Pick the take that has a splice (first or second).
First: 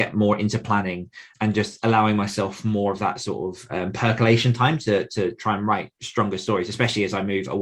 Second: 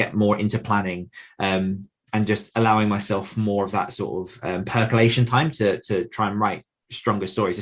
first